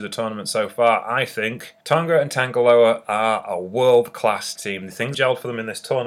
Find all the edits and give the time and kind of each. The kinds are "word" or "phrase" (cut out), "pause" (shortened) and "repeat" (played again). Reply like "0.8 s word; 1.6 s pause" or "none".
1.8 s pause; 4.6 s word; 5.1 s word

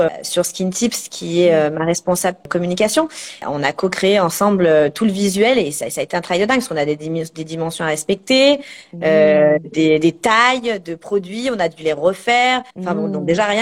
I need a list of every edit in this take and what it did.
12.7 s pause

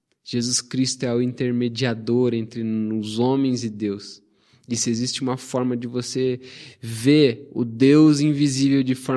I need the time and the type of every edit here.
none

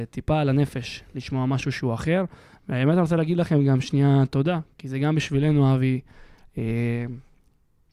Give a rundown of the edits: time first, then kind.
none

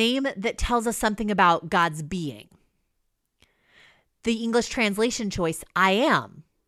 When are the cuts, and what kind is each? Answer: none

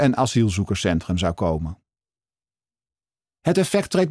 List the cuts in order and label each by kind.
none

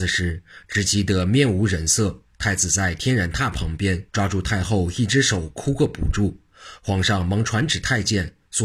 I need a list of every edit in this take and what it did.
4.1 s pause

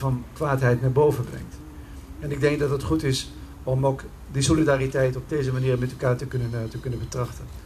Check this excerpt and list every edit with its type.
none

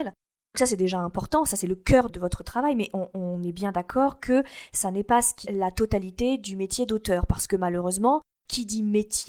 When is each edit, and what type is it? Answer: 5.4 s word

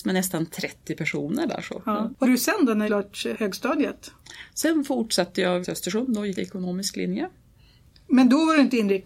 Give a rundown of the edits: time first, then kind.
2.2 s word; 2.9 s word; 3.3 s word; 5.6 s word; 6.3 s word

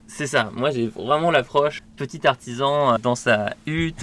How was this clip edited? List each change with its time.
1.8 s word; 3.0 s word

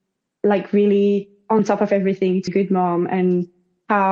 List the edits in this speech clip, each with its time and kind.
2.5 s word

